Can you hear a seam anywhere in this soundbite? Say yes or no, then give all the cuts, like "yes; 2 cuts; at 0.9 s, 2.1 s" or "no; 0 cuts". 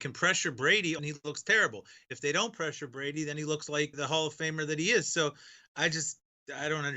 yes; 2 cuts; at 1.0 s, 3.9 s